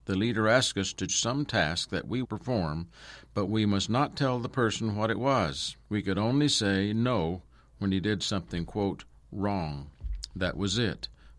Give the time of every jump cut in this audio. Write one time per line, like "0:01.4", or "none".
0:01.1
0:02.2
0:05.8